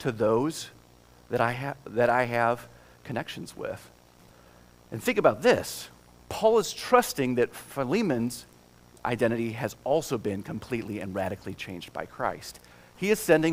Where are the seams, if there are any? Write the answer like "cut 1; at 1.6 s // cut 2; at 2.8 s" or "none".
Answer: cut 1; at 4.3 s